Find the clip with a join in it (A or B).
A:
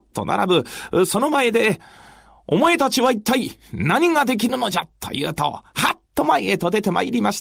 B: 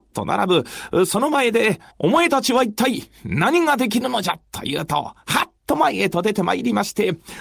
B